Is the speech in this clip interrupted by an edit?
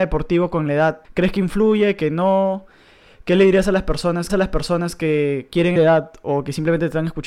yes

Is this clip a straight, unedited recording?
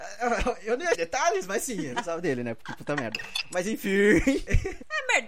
no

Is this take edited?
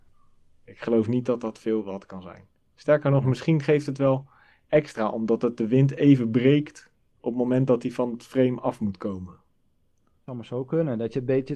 no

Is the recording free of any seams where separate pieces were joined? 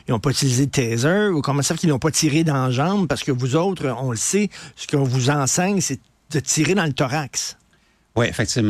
yes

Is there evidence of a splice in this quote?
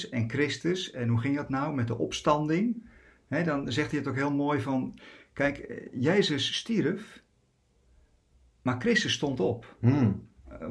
no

